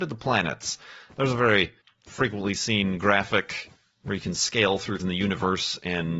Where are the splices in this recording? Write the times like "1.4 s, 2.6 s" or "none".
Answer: 1.8 s, 5.0 s